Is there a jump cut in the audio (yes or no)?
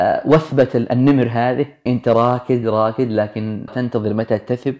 yes